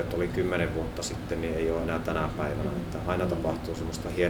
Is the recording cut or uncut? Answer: uncut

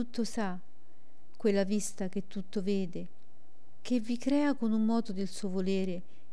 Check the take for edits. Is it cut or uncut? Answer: uncut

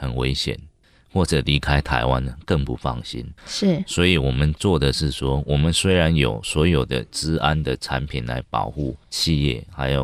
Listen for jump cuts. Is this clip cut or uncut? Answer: cut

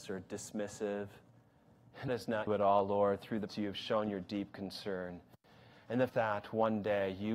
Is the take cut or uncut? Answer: cut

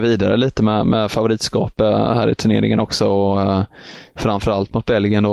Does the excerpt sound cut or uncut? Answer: uncut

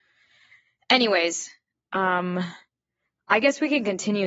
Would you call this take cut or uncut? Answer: uncut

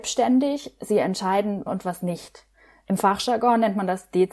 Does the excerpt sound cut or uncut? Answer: cut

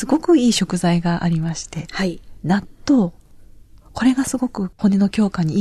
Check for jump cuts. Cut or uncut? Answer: uncut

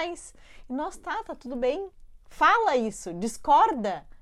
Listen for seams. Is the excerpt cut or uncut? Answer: uncut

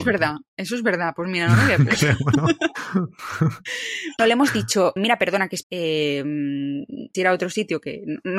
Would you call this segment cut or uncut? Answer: cut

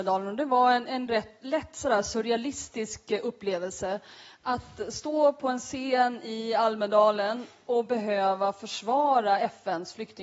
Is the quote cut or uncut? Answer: uncut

